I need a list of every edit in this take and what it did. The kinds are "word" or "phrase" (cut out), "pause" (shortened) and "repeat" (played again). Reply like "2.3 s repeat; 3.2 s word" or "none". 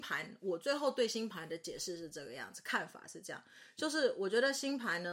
none